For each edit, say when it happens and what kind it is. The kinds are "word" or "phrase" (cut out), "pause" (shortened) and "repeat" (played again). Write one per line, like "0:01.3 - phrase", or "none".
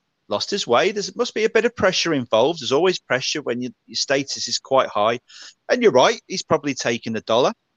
none